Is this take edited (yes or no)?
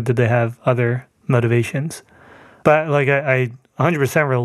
no